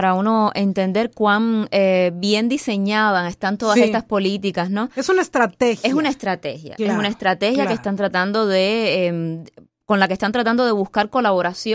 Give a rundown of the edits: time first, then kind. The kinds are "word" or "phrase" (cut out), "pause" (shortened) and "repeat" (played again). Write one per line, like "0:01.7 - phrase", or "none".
none